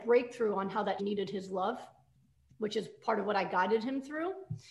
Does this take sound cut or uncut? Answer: cut